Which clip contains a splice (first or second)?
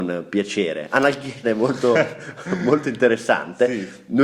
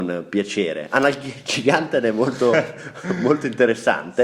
first